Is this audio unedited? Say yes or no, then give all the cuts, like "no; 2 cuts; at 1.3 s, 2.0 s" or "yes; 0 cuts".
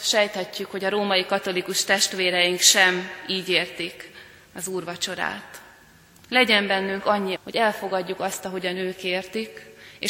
no; 1 cut; at 7.4 s